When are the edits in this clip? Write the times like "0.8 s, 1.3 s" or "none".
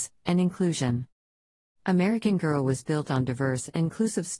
none